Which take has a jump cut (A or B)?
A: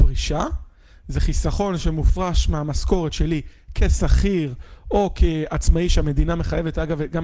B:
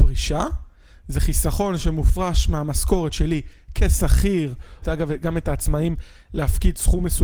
B